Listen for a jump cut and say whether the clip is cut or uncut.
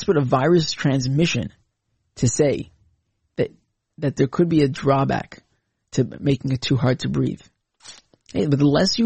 uncut